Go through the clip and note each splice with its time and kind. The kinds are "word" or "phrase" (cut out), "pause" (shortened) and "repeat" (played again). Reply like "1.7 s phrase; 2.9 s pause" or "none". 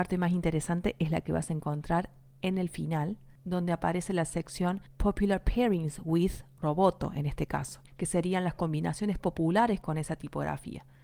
7.9 s pause